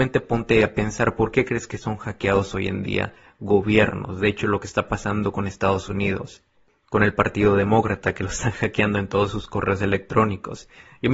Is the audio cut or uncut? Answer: uncut